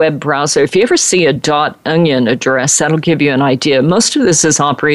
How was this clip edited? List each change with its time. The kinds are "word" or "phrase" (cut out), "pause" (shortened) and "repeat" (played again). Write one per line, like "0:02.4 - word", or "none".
none